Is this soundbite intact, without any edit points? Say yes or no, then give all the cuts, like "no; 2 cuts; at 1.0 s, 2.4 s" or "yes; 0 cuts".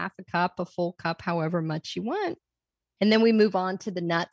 yes; 0 cuts